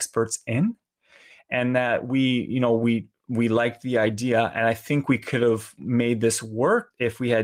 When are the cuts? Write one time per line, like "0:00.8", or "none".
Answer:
none